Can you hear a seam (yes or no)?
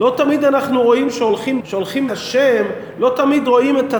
yes